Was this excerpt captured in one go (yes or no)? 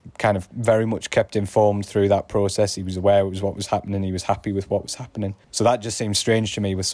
no